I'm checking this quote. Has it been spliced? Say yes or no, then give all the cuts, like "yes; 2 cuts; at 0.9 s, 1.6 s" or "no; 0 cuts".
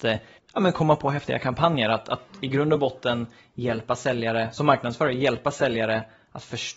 no; 0 cuts